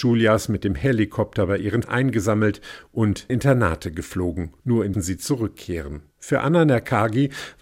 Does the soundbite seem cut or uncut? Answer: cut